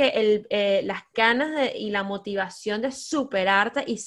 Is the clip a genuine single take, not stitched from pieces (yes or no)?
yes